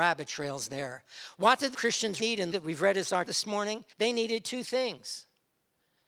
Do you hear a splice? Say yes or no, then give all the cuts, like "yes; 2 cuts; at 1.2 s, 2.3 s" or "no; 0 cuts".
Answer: yes; 5 cuts; at 1.7 s, 2.2 s, 2.5 s, 3.3 s, 3.9 s